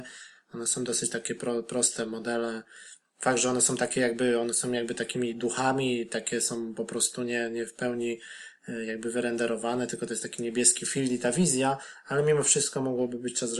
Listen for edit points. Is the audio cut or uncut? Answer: uncut